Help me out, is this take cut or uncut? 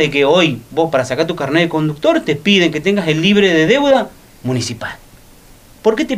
uncut